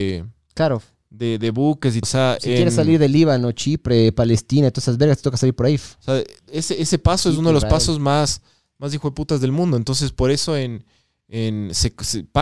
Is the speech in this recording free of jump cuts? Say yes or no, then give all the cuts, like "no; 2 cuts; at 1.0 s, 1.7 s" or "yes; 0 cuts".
no; 1 cut; at 2.0 s